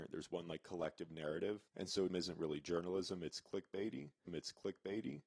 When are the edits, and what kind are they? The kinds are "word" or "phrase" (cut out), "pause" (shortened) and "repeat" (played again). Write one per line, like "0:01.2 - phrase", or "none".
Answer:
0:01.7 - pause
0:02.1 - word
0:04.3 - repeat